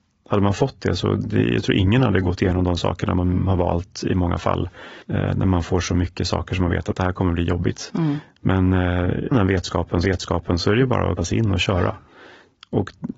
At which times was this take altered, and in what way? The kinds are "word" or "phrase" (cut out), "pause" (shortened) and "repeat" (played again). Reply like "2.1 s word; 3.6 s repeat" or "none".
5.0 s pause; 9.3 s word; 10.0 s repeat; 11.2 s word